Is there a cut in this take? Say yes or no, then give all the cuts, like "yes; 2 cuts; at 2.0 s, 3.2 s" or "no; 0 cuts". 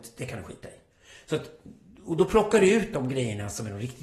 no; 0 cuts